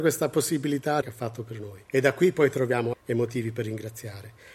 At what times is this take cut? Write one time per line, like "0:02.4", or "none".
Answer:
0:01.0
0:01.9
0:02.9